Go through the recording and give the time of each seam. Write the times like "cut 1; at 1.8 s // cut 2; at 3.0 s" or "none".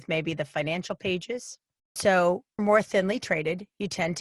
cut 1; at 2.0 s // cut 2; at 2.6 s